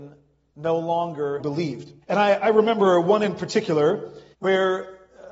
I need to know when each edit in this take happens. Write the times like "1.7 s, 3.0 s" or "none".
1.4 s, 2.0 s, 4.3 s